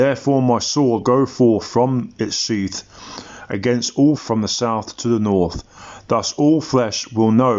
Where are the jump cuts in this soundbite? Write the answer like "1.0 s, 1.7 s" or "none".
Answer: 1.0 s, 4.2 s